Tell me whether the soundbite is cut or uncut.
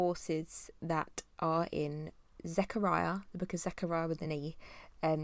uncut